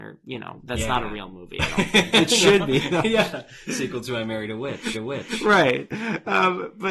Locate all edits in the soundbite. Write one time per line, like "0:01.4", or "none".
0:04.9